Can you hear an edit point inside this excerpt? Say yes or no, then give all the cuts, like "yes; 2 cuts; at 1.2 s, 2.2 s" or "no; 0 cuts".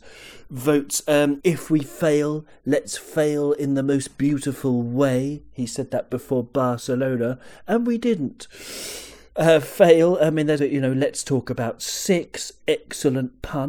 yes; 2 cuts; at 1.4 s, 10.6 s